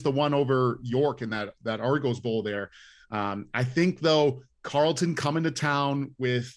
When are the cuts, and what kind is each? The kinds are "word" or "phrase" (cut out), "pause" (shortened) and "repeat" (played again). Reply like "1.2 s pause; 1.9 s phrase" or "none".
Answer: none